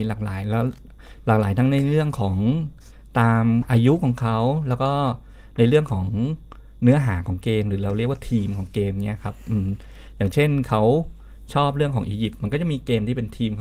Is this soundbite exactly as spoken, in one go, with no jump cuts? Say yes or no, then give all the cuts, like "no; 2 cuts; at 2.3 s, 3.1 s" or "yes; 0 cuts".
yes; 0 cuts